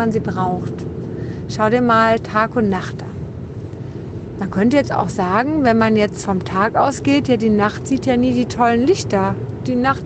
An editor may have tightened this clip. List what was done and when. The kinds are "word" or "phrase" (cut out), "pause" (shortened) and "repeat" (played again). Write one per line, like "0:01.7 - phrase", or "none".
0:06.2 - word